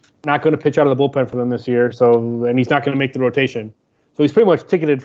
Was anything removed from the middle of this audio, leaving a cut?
no; 0 cuts

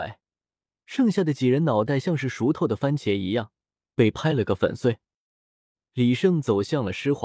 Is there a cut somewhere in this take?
no; 0 cuts

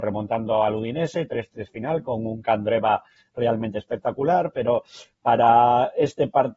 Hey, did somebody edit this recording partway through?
no; 0 cuts

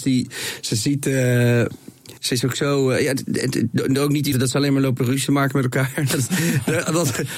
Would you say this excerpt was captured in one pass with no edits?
no; 2 cuts; at 2.2 s, 4.3 s

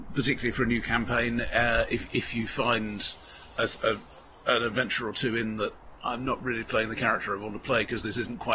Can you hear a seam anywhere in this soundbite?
no; 0 cuts

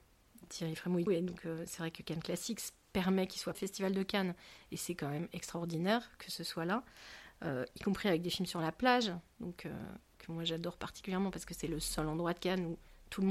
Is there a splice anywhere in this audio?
yes; 2 cuts; at 1.1 s, 3.5 s

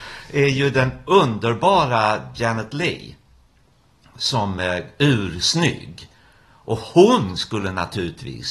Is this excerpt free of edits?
yes; 0 cuts

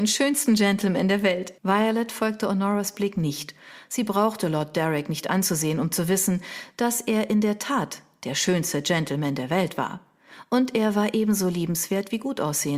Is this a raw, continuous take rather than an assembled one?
no; 1 cut; at 1.6 s

